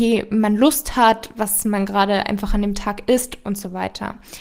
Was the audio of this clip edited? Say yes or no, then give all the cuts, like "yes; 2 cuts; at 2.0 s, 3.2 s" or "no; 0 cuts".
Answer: no; 0 cuts